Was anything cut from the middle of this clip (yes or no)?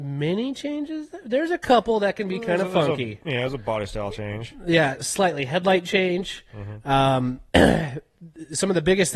yes